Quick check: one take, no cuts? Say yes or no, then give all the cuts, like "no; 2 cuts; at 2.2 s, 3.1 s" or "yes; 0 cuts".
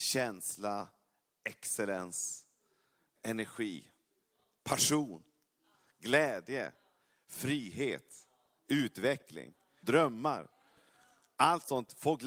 no; 2 cuts; at 3.2 s, 9.8 s